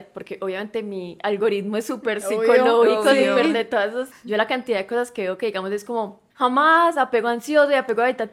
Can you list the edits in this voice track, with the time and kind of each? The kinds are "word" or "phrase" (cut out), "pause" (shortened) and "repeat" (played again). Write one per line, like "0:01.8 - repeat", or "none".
0:04.1 - word
0:06.3 - pause